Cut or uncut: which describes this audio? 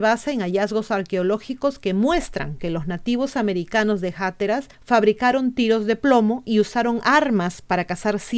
cut